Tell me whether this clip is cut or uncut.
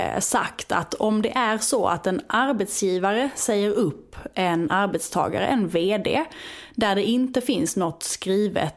uncut